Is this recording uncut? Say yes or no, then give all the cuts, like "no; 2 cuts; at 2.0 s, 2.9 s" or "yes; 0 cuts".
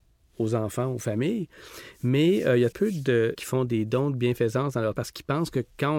no; 3 cuts; at 2.7 s, 3.3 s, 4.9 s